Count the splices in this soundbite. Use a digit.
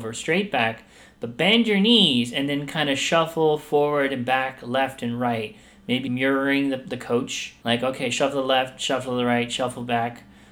2